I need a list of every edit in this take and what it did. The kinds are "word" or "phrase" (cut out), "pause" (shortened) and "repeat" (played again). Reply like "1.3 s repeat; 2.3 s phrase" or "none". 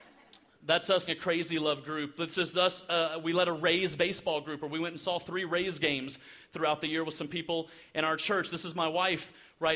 1.1 s word